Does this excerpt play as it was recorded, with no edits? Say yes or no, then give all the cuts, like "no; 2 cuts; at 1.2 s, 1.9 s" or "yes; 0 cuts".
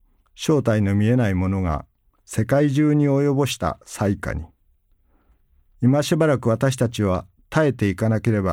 yes; 0 cuts